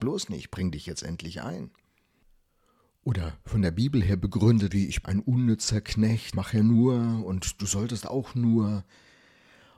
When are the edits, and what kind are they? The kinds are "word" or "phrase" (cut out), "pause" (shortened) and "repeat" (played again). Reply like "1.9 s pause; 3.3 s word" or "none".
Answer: 4.7 s word; 5.0 s word; 6.3 s word